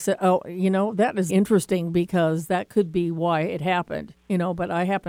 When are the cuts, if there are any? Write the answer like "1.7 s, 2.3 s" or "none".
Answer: 1.3 s, 4.2 s